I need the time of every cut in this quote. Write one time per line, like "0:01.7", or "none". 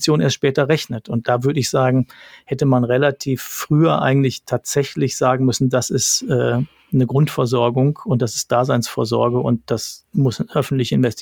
none